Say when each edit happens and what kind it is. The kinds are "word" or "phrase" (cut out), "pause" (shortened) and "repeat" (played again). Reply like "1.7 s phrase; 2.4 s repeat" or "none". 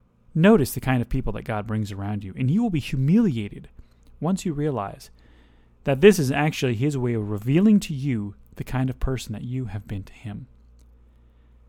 none